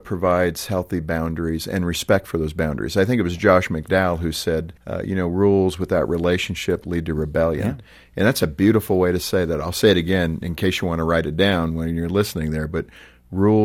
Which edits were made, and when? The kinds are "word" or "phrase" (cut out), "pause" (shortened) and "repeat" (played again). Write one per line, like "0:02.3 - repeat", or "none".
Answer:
0:04.8 - pause